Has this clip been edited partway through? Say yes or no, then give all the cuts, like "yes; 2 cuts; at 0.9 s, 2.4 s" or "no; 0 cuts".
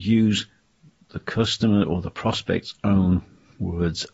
no; 0 cuts